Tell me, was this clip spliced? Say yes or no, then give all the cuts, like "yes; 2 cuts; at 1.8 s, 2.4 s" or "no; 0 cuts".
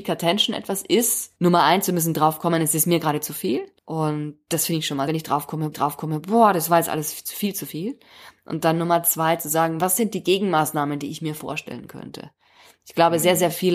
yes; 4 cuts; at 1.4 s, 3.8 s, 5.1 s, 5.7 s